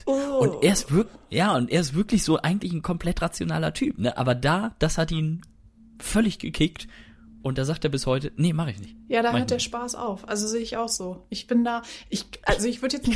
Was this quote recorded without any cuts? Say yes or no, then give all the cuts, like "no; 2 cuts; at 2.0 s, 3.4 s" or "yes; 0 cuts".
yes; 0 cuts